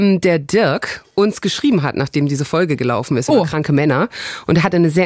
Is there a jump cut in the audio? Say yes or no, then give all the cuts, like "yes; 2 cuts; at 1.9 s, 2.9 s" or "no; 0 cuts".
no; 0 cuts